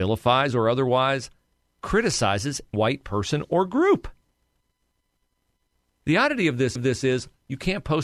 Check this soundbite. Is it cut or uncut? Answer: cut